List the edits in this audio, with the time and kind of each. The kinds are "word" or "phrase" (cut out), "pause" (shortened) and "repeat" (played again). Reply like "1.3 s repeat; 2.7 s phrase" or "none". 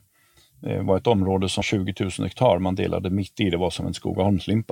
1.6 s word